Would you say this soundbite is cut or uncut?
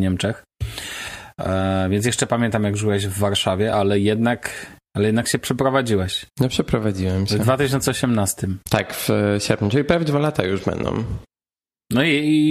cut